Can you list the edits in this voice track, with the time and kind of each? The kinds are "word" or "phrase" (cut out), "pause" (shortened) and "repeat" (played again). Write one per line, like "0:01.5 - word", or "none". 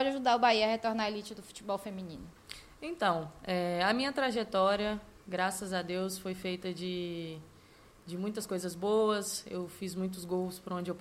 none